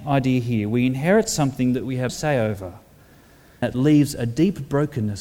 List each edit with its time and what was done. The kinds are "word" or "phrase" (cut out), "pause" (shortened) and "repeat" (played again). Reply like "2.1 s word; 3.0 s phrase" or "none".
2.1 s word; 3.6 s word